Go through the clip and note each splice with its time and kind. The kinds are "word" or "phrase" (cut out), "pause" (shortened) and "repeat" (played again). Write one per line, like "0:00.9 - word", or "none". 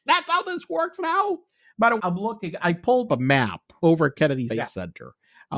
0:02.0 - word
0:03.1 - word
0:04.5 - word